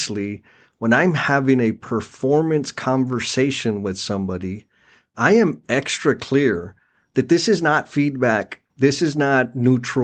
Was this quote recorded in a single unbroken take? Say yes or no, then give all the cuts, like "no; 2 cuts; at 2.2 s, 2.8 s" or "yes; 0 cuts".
no; 1 cut; at 8.7 s